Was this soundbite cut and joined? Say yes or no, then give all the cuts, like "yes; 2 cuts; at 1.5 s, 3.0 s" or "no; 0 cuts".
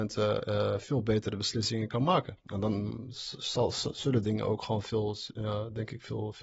yes; 1 cut; at 2.4 s